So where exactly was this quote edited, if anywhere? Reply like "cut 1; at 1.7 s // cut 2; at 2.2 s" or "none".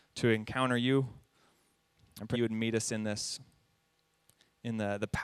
cut 1; at 2.3 s